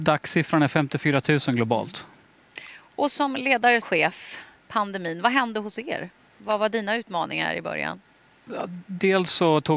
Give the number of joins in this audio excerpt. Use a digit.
1